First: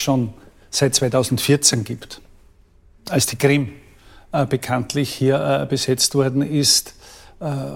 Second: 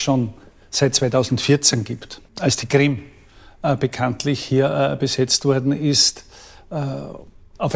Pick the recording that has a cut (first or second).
second